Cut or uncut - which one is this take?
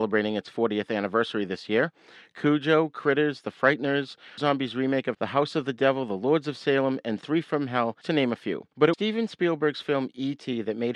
cut